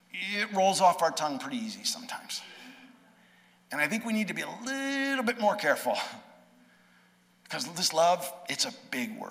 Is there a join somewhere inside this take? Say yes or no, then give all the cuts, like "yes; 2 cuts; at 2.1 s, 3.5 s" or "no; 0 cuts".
no; 0 cuts